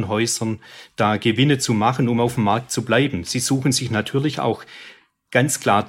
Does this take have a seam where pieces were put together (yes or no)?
no